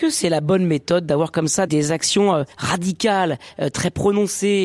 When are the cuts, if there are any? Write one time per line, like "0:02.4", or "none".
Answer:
0:01.7
0:02.5